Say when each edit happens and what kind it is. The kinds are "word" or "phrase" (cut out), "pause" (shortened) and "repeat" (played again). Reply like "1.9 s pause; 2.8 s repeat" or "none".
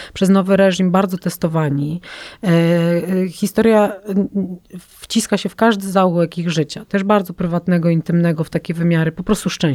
none